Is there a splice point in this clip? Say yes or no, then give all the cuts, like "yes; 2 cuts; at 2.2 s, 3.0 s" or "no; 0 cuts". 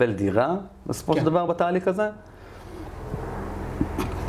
no; 0 cuts